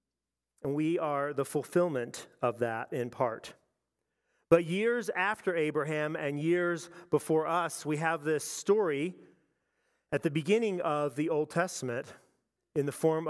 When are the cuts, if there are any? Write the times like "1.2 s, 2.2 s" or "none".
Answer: none